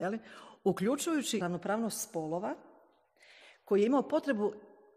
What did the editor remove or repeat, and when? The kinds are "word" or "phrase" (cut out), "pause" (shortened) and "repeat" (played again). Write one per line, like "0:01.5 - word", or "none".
0:01.4 - phrase